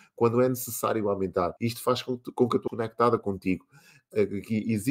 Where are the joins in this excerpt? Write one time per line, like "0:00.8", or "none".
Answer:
0:01.6
0:02.7